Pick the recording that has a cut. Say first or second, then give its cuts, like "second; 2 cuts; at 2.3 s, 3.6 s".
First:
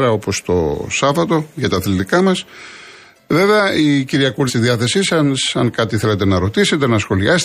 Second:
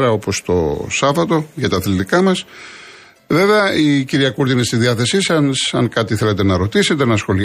first; 1 cut; at 4.5 s